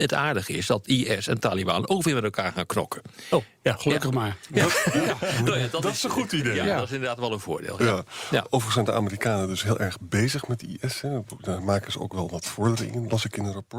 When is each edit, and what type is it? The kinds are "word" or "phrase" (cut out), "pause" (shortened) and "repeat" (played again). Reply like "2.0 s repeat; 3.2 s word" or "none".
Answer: none